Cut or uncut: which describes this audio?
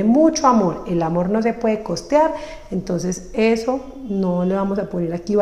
uncut